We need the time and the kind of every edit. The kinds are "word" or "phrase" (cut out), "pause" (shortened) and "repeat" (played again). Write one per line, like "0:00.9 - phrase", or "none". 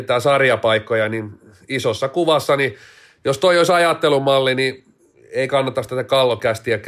none